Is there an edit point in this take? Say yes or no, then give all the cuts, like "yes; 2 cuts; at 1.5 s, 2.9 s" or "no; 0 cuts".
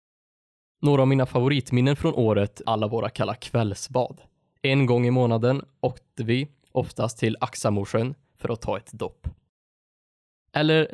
yes; 1 cut; at 2.6 s